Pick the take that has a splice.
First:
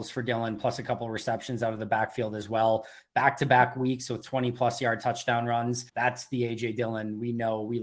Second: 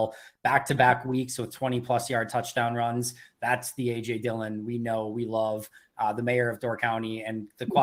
first; 1 cut; at 5.9 s

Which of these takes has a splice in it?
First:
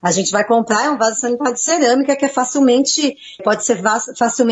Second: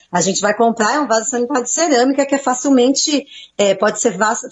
first; 1 cut; at 3.4 s

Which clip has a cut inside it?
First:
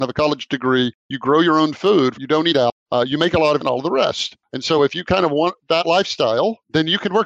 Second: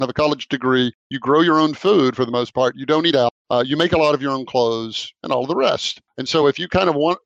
first; 2 cuts; at 2.1 s, 3.6 s

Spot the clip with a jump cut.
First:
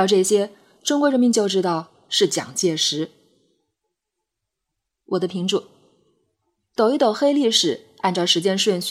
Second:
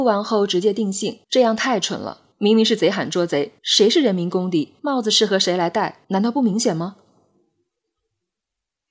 second; 5 cuts; at 1.2 s, 2.3 s, 3.6 s, 4.8 s, 6.0 s

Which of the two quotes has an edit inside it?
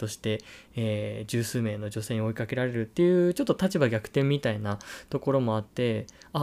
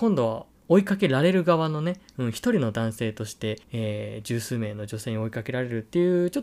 second; 1 cut; at 3.6 s

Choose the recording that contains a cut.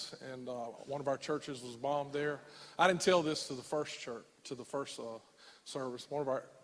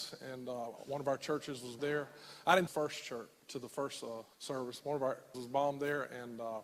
second; 4 cuts; at 1.8 s, 2.7 s, 4.3 s, 5.3 s

